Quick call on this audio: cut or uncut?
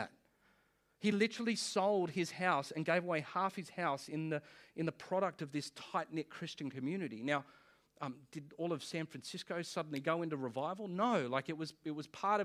uncut